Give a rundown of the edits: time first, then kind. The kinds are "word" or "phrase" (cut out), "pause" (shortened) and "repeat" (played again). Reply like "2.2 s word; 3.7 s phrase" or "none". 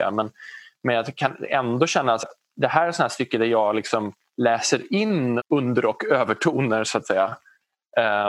2.2 s word; 5.4 s word